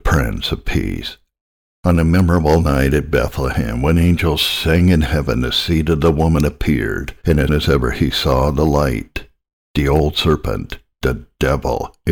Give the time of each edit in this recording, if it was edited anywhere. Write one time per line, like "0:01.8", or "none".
0:07.5